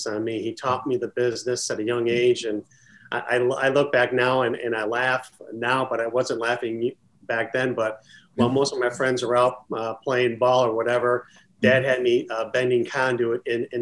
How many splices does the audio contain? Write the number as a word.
zero